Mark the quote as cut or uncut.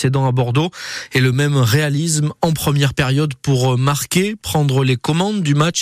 uncut